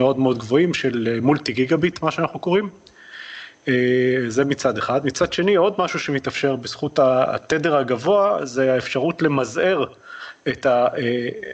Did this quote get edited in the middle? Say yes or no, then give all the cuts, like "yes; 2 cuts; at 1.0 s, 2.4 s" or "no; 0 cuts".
no; 0 cuts